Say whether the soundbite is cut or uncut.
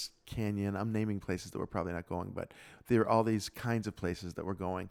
uncut